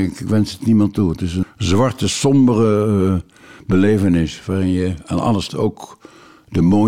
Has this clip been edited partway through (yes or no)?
yes